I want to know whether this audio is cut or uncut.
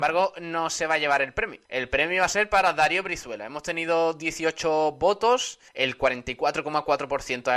cut